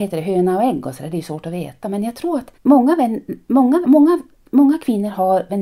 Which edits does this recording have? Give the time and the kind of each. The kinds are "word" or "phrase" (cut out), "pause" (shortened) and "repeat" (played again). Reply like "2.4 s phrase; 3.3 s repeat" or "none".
2.5 s pause; 3.8 s word